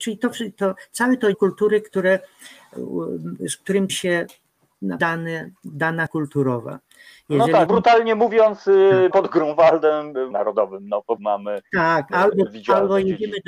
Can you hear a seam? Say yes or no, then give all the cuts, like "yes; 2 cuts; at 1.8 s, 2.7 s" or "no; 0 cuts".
yes; 9 cuts; at 1.3 s, 3.9 s, 5.0 s, 6.1 s, 7.7 s, 9.1 s, 10.3 s, 11.2 s, 12.1 s